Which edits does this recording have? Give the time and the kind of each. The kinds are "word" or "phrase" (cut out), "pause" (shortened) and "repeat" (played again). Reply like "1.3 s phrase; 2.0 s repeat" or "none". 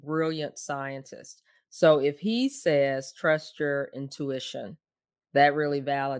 none